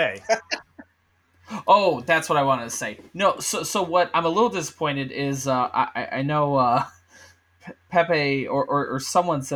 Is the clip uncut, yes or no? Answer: yes